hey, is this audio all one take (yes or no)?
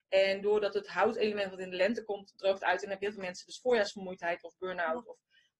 yes